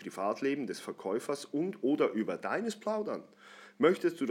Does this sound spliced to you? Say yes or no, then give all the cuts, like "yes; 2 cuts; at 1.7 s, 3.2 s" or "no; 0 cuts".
no; 0 cuts